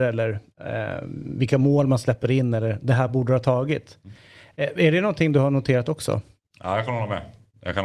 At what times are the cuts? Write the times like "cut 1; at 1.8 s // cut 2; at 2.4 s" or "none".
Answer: none

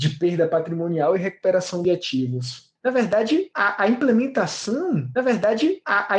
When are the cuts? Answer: cut 1; at 2.8 s // cut 2; at 5.1 s

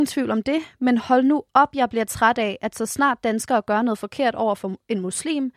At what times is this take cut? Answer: none

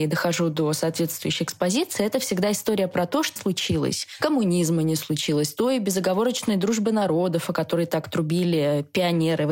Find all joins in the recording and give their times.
cut 1; at 3.4 s

